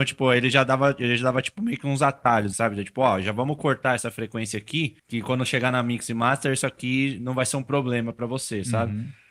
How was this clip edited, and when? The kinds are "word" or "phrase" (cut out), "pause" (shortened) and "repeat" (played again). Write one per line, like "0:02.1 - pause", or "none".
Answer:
0:02.5 - word
0:05.0 - pause